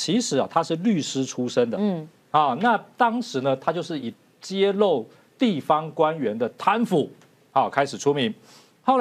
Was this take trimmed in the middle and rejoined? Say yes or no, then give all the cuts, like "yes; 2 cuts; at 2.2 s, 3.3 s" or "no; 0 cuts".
no; 0 cuts